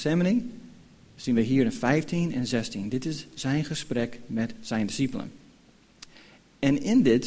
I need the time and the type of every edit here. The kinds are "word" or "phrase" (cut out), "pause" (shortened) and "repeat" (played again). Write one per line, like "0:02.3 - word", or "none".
none